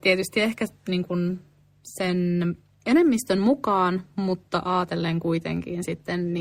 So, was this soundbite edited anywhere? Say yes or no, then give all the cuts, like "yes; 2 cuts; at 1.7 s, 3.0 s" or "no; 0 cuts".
no; 0 cuts